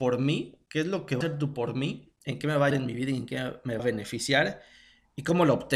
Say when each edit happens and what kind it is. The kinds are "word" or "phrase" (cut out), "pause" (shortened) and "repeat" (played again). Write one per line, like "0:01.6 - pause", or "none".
0:01.2 - word
0:01.5 - word
0:02.7 - word
0:03.8 - word